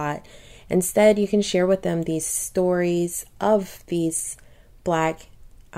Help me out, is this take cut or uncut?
uncut